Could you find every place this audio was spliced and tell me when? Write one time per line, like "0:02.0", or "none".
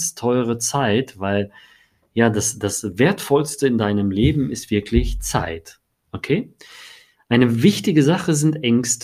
none

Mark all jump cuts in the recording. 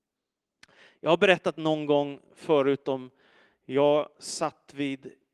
none

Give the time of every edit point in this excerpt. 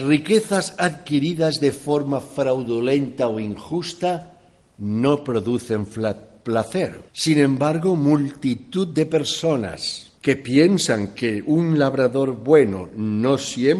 0:07.1
0:10.2

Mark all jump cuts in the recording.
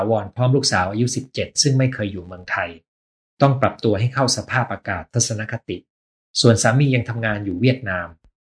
none

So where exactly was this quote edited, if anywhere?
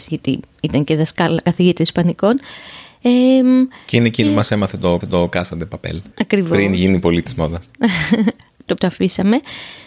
0:05.0
0:06.1
0:08.8

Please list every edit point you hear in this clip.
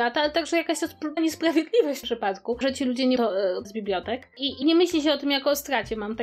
0:01.2
0:02.0
0:02.6
0:03.2
0:03.6
0:04.6

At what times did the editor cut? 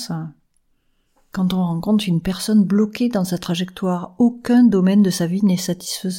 none

